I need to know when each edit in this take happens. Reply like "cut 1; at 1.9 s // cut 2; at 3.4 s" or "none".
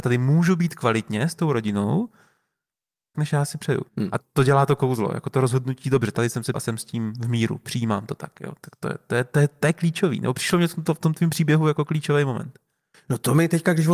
cut 1; at 3.1 s // cut 2; at 3.9 s // cut 3; at 4.2 s // cut 4; at 6.5 s